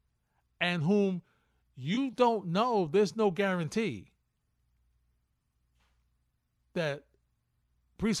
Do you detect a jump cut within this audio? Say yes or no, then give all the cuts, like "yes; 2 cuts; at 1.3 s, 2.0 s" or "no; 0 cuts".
no; 0 cuts